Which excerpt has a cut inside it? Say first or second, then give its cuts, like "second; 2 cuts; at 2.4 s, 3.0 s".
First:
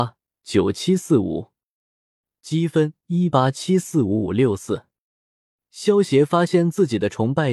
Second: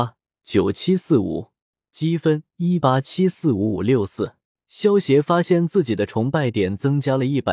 second; 2 cuts; at 1.6 s, 4.4 s